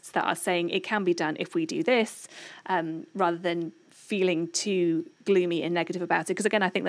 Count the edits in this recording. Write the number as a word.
one